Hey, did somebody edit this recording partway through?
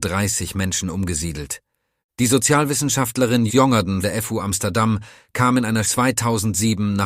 yes; 3 cuts; at 3.5 s, 4.0 s, 5.8 s

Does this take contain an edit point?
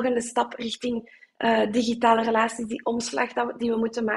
no; 0 cuts

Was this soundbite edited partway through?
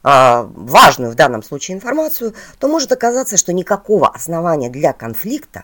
no; 0 cuts

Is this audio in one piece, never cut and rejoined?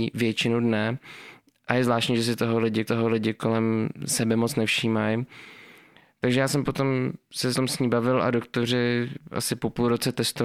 no; 2 cuts; at 2.9 s, 7.5 s

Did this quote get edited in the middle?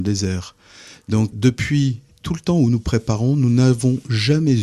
yes; 1 cut; at 1.3 s

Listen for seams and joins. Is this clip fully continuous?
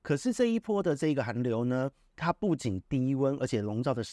yes; 0 cuts

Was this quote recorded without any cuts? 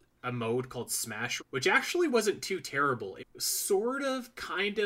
no; 2 cuts; at 1.4 s, 3.2 s

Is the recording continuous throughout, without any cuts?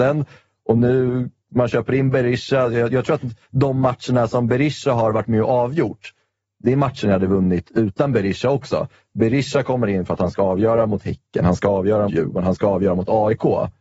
no; 1 cut; at 12.1 s

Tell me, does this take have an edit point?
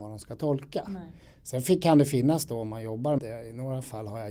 yes; 1 cut; at 3.2 s

